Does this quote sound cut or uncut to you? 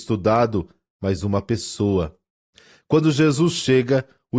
uncut